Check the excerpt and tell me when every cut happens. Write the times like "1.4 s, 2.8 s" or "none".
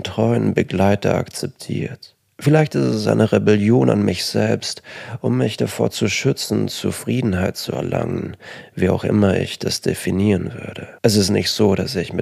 11.0 s

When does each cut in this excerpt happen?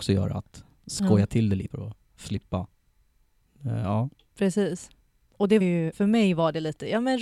1.7 s, 2.3 s, 5.6 s, 5.9 s

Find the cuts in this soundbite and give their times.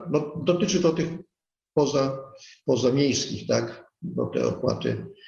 none

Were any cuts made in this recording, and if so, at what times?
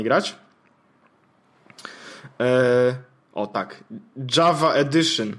none

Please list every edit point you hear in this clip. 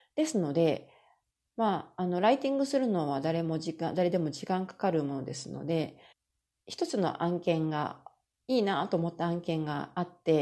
6.1 s

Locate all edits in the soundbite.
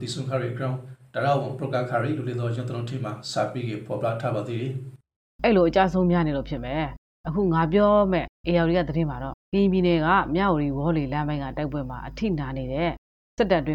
9.4 s

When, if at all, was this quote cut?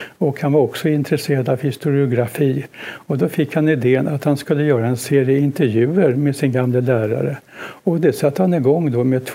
none

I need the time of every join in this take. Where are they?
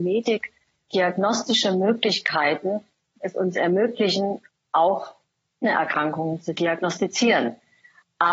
3.2 s, 5.6 s

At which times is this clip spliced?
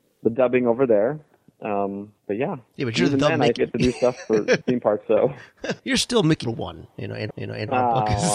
2.2 s, 2.7 s, 3.6 s, 4.6 s, 5.0 s, 5.8 s, 6.4 s, 7.3 s

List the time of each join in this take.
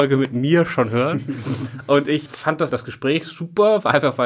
2.3 s, 2.7 s

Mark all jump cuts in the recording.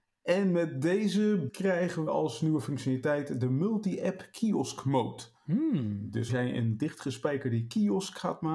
1.5 s, 2.1 s, 5.3 s, 6.3 s

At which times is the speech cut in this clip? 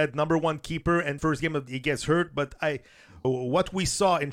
1.2 s, 1.7 s, 3.2 s

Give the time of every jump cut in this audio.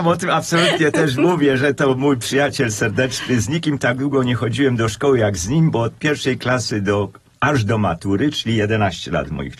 none

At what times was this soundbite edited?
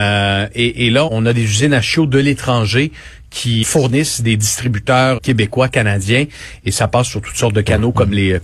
1.1 s, 3.6 s, 5.2 s

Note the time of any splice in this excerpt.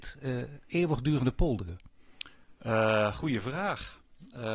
none

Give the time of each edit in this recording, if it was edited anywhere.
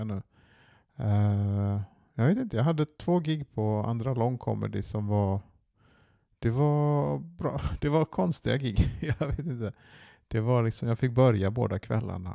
none

